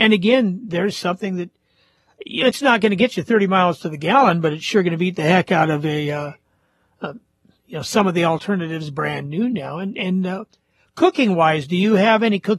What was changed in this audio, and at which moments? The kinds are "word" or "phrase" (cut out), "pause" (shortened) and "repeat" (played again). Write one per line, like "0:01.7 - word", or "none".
none